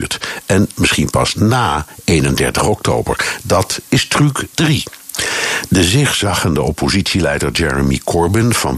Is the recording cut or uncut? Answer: uncut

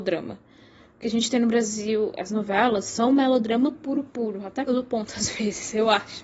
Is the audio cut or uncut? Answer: cut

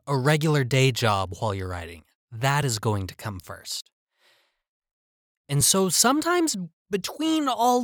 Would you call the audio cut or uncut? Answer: uncut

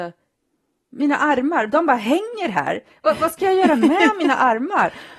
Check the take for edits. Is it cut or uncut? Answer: uncut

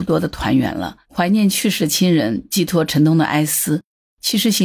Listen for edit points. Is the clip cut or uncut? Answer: cut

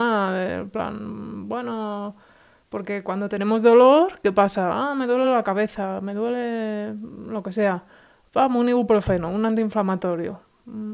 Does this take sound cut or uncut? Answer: uncut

